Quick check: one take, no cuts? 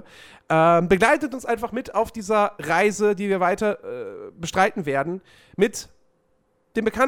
yes; 0 cuts

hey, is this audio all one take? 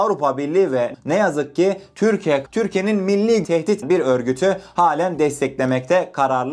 no; 4 cuts; at 0.9 s, 2.5 s, 3.4 s, 3.8 s

